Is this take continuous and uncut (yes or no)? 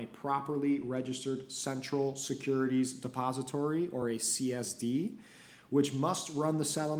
yes